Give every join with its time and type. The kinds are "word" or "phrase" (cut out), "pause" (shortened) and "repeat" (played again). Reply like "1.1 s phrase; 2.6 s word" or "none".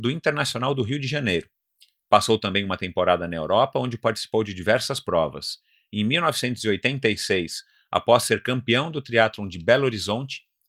none